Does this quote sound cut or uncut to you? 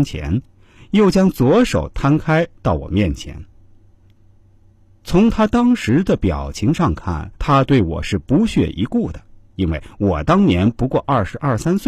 cut